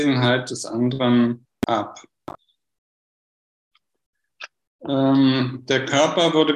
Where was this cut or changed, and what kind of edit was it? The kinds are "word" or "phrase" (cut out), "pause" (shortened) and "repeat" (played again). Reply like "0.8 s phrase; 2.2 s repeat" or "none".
none

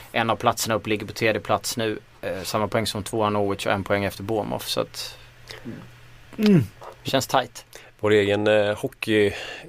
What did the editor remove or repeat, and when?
6.3 s pause

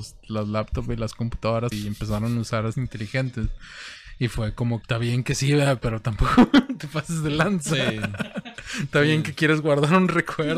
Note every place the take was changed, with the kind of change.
1.7 s word; 2.7 s word; 4.8 s phrase

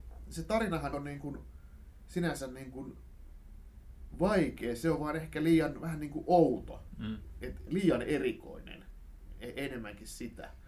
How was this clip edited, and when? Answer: 0.9 s word; 7.7 s word

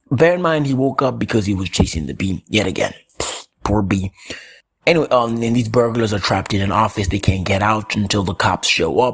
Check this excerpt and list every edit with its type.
4.6 s pause

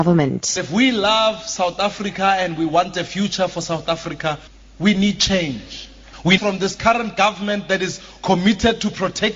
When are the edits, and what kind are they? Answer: 4.5 s pause; 6.4 s phrase

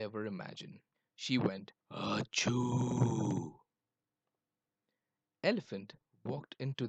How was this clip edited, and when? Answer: 0.9 s pause; 1.8 s pause

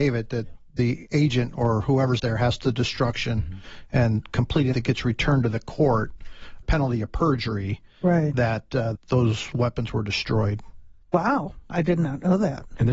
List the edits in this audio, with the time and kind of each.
2.2 s word; 2.6 s word; 4.7 s word; 6.6 s word; 9.0 s phrase; 11.0 s pause

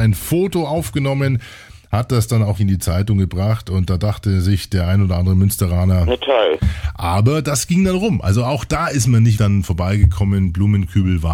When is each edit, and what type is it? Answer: 2.6 s word; 9.4 s word

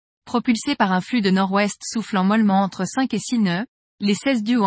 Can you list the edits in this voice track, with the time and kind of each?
none

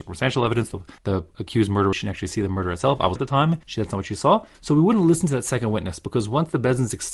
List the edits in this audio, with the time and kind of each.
1.0 s pause; 1.9 s phrase; 3.2 s phrase; 3.6 s pause; 4.5 s pause

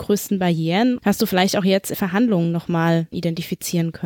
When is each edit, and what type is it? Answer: 1.0 s word; 1.9 s word; 3.1 s word

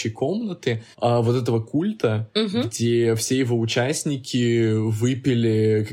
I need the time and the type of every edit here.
0.9 s pause

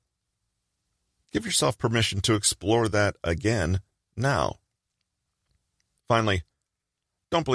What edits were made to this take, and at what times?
none

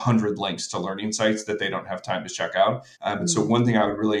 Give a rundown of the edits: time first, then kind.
2.9 s pause

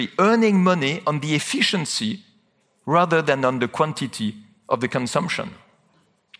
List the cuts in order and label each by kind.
none

